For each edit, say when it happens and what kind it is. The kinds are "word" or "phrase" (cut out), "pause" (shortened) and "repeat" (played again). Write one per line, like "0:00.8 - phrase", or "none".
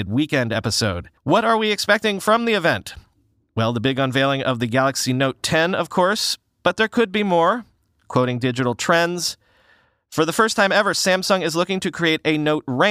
0:01.2 - pause